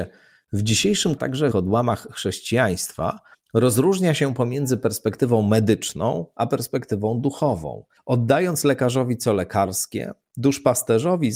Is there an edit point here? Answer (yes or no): yes